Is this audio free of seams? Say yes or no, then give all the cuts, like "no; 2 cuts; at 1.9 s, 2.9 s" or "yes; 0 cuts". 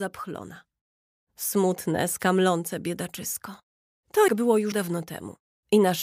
no; 2 cuts; at 4.3 s, 4.7 s